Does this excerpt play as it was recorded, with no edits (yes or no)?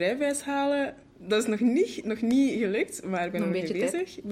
yes